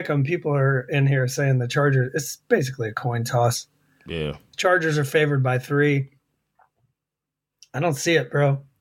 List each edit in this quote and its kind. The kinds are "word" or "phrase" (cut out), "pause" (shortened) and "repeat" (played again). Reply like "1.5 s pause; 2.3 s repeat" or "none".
none